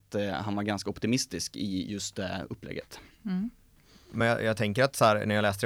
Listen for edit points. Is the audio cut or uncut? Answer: uncut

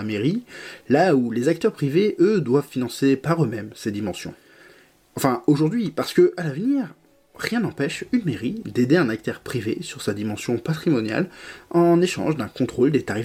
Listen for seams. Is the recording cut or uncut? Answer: uncut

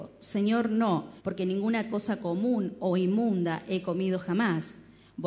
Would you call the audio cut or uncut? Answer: cut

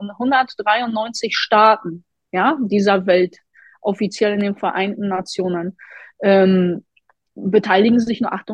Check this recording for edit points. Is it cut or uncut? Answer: uncut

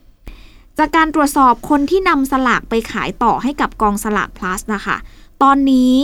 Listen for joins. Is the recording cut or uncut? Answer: uncut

